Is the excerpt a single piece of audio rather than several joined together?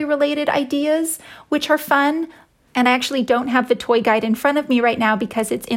yes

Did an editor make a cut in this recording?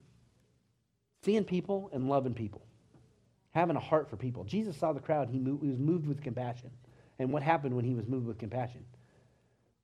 no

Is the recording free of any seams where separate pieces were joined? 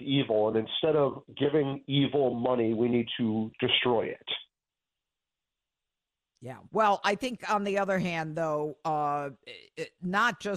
no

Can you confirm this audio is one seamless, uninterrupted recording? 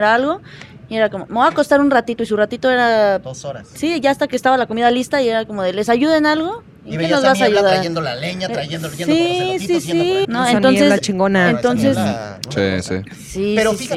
no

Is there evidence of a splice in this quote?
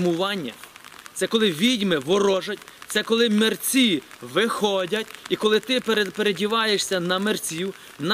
no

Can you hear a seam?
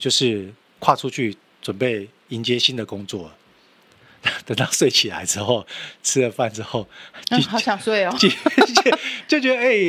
yes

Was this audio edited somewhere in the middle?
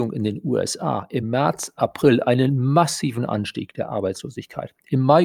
no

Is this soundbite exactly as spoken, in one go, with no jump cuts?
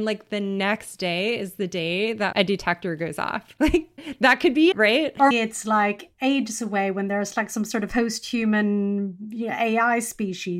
no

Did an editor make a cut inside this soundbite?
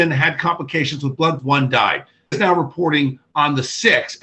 yes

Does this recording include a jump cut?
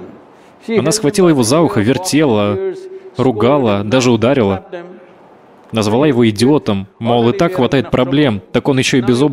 no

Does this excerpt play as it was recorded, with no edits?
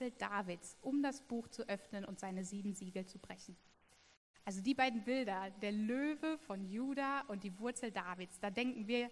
yes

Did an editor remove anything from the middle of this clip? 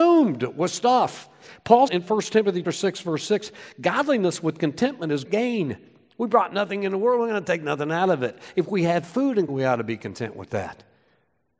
yes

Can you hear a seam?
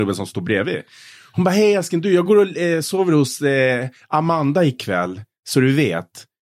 no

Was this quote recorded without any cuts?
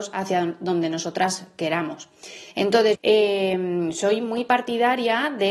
no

